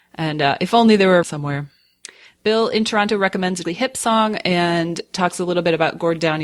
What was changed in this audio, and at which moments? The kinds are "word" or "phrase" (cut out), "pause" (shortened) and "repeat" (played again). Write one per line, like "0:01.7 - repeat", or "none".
0:01.2 - phrase
0:03.6 - word